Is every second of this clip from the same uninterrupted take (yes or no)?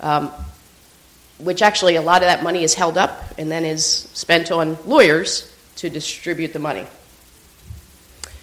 yes